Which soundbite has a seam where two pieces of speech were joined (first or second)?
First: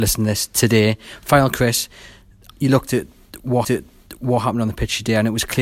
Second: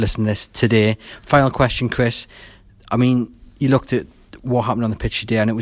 first